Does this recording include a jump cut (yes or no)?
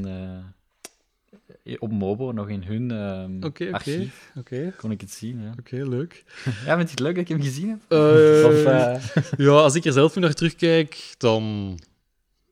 no